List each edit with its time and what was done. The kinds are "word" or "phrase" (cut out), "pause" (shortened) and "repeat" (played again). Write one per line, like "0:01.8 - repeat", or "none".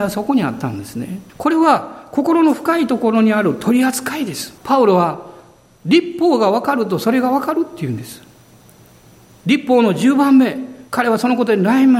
0:01.3 - pause
0:04.6 - pause
0:10.9 - pause